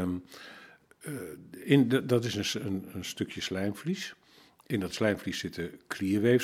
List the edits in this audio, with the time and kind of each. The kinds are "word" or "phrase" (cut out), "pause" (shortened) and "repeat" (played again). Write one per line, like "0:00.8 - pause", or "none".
none